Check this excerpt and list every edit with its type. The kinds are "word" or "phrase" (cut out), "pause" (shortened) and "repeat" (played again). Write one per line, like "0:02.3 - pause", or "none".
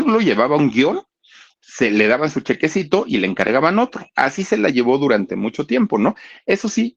none